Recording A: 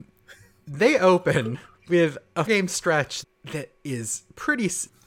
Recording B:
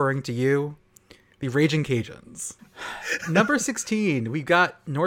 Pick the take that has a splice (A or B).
A